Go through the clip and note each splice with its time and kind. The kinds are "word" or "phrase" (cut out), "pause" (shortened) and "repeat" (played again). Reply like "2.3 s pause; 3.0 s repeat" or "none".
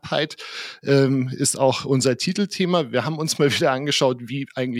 none